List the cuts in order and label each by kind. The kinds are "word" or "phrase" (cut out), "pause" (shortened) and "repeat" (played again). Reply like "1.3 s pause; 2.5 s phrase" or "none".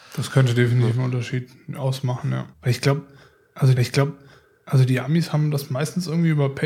2.5 s pause; 3.8 s repeat

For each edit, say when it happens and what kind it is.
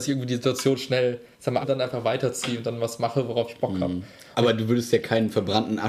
1.6 s word

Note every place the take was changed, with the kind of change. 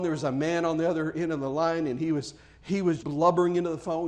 3.0 s word

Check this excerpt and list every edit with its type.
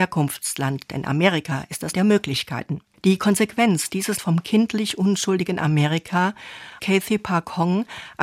1.9 s word; 2.8 s pause; 4.2 s word; 6.8 s word

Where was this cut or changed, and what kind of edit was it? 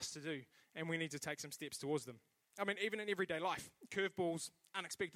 none

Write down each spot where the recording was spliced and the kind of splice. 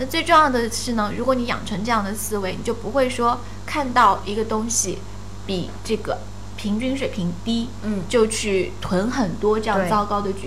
none

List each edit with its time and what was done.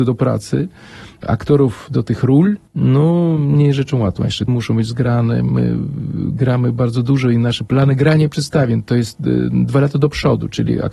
2.7 s pause; 4.5 s word

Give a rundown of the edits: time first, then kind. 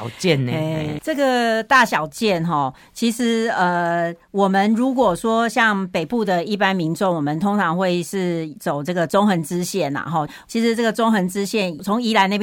1.0 s word

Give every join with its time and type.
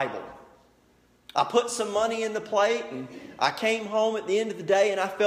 none

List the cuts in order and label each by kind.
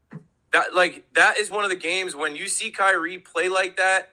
none

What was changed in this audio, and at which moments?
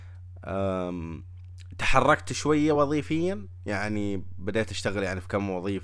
none

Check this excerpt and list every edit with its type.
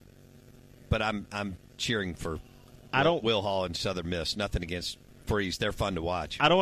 5.1 s pause

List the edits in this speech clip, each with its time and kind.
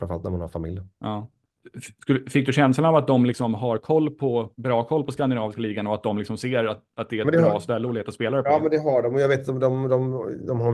0.9 s pause; 4.5 s pause

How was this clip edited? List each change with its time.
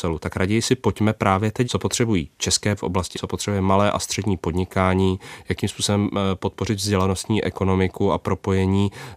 1.6 s word; 2.8 s word; 3.1 s word

